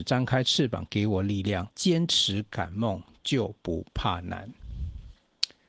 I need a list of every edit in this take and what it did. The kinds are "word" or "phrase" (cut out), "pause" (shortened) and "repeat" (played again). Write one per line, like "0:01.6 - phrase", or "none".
0:01.7 - pause